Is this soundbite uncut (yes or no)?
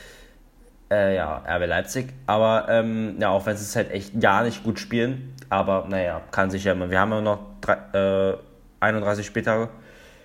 yes